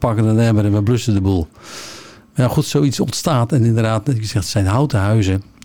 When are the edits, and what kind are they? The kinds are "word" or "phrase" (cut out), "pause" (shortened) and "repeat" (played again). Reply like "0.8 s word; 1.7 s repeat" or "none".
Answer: none